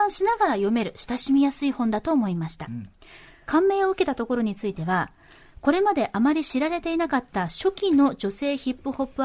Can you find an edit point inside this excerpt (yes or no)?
yes